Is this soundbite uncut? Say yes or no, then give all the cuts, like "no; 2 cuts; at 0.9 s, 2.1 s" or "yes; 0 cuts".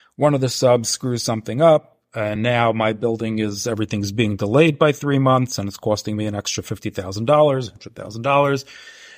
yes; 0 cuts